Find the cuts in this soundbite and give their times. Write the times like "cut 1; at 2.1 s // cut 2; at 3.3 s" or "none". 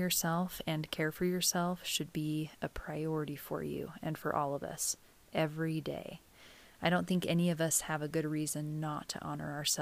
none

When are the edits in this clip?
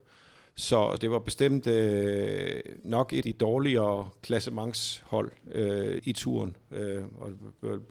cut 1; at 1.0 s // cut 2; at 3.2 s // cut 3; at 6.0 s

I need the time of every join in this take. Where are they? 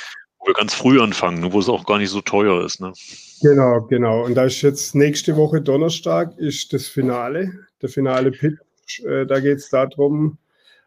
none

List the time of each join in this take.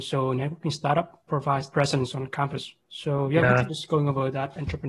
cut 1; at 1.3 s // cut 2; at 1.7 s // cut 3; at 2.8 s // cut 4; at 3.7 s

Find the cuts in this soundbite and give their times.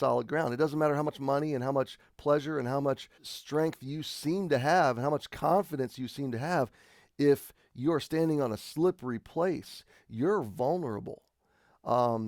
cut 1; at 3.2 s

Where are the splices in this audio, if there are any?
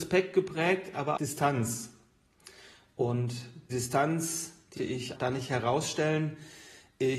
cut 1; at 1.2 s // cut 2; at 3.7 s // cut 3; at 4.8 s // cut 4; at 5.1 s

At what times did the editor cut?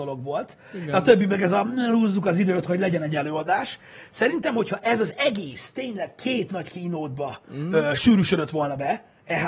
none

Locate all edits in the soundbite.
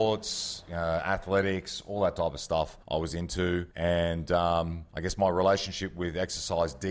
cut 1; at 2.8 s // cut 2; at 3.7 s // cut 3; at 4.9 s

